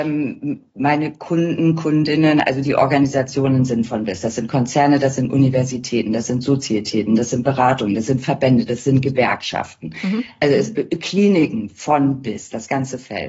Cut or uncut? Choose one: uncut